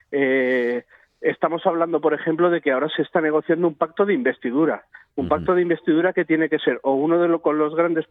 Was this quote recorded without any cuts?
yes; 0 cuts

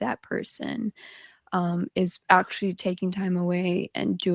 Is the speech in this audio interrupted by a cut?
no; 0 cuts

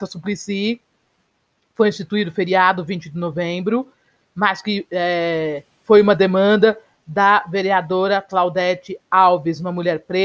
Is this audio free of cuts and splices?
yes; 0 cuts

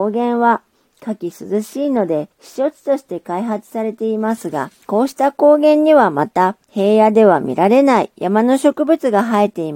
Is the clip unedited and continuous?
no; 3 cuts; at 2.3 s, 4.8 s, 6.6 s

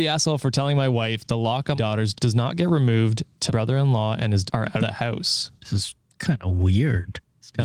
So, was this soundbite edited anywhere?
yes; 5 cuts; at 1.7 s, 2.1 s, 3.5 s, 4.5 s, 4.8 s

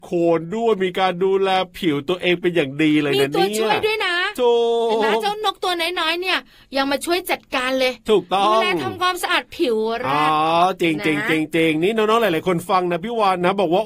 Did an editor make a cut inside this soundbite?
no; 0 cuts

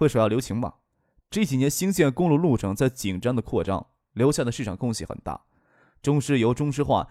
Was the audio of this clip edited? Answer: no; 0 cuts

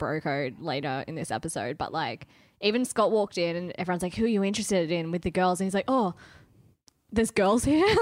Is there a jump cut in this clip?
no; 0 cuts

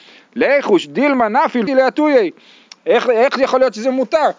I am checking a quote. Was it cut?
yes; 1 cut; at 1.7 s

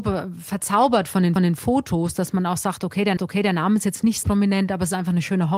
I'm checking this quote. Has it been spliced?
yes; 3 cuts; at 1.4 s, 3.2 s, 4.2 s

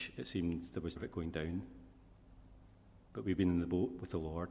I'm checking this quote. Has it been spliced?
yes; 1 cut; at 1.0 s

